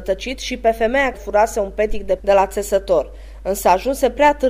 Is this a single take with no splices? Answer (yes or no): no